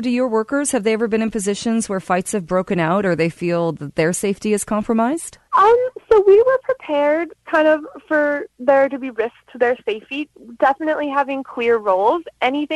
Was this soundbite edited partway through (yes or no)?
yes